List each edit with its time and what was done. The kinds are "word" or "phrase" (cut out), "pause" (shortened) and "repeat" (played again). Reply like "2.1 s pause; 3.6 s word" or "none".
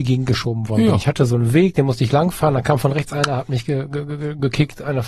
none